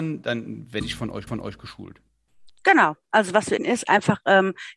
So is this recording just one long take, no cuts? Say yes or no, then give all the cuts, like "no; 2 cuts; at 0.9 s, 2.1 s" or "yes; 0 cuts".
no; 2 cuts; at 1.3 s, 3.6 s